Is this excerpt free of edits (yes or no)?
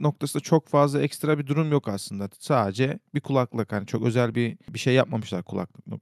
yes